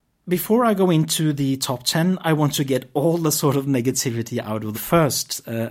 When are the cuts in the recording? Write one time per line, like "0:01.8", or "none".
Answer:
0:04.7